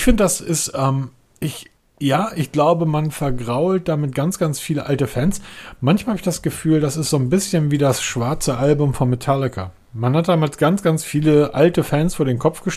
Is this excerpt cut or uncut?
uncut